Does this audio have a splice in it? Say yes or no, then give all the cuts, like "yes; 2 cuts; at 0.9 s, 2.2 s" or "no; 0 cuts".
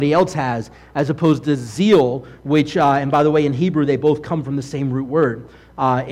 no; 0 cuts